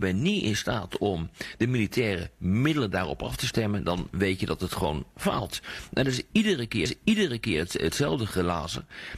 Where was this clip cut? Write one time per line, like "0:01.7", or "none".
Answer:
0:06.9